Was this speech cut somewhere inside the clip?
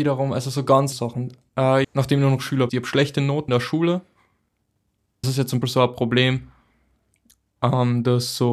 yes; 6 cuts; at 0.9 s, 1.8 s, 2.7 s, 3.5 s, 5.2 s, 5.6 s

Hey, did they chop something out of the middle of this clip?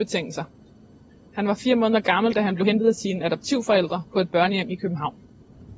no; 0 cuts

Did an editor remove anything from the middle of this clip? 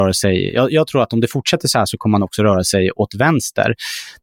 no; 0 cuts

